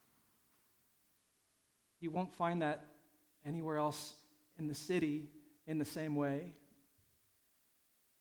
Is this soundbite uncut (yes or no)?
yes